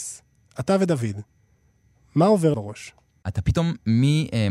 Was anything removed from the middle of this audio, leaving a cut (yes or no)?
yes